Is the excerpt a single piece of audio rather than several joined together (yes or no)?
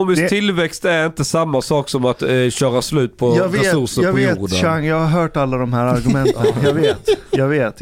yes